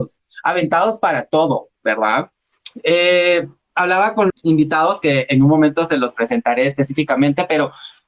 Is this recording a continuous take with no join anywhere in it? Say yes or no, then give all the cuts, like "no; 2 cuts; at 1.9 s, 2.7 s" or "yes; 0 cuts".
no; 1 cut; at 4.3 s